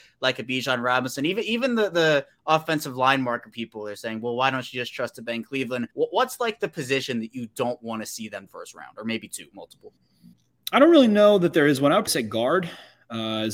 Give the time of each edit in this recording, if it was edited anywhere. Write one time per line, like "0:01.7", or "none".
0:03.5
0:05.9
0:08.5
0:10.3
0:12.1